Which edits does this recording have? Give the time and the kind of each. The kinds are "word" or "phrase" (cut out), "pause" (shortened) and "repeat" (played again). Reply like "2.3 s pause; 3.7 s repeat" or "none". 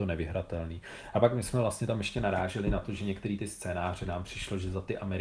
none